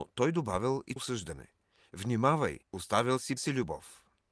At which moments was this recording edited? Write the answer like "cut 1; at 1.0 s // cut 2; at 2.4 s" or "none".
cut 1; at 1.0 s // cut 2; at 2.6 s // cut 3; at 3.4 s